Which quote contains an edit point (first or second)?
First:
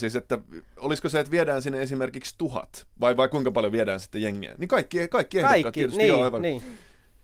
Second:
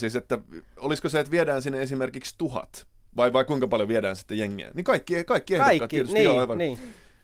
first